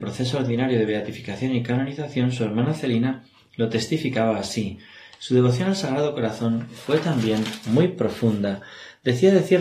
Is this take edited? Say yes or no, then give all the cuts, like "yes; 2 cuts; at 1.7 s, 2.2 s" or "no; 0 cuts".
no; 0 cuts